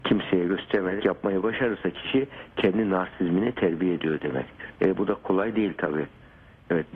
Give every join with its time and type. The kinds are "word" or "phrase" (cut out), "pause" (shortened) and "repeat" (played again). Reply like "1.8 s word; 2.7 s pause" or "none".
1.0 s word; 4.7 s pause

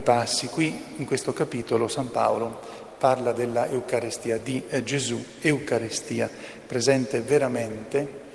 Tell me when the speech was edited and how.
none

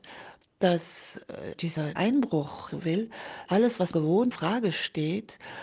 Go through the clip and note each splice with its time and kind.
1.5 s word; 2.0 s word; 2.7 s phrase; 3.5 s word; 3.9 s word; 4.3 s phrase

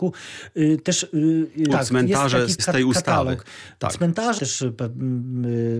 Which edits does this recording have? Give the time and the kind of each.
1.7 s word; 2.6 s word; 4.4 s word

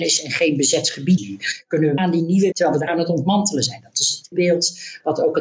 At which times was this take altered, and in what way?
1.2 s word; 2.0 s word; 2.5 s word; 2.9 s phrase; 4.3 s word

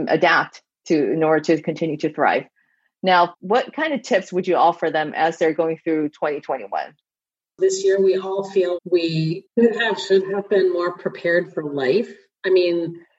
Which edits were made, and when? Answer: 3.3 s phrase; 8.8 s word

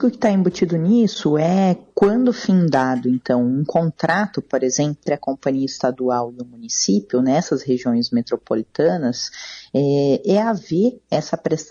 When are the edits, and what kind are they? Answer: 5.1 s word

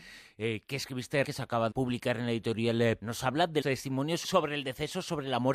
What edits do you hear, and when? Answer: 1.2 s word; 1.7 s word; 3.0 s word; 3.6 s word; 4.2 s word

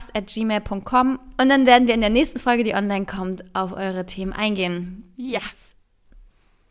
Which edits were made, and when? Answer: 5.1 s pause

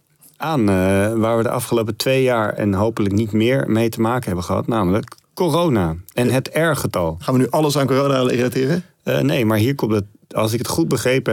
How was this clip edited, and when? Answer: 5.2 s pause

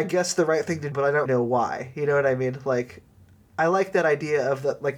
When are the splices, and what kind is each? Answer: 0.9 s word; 1.3 s word

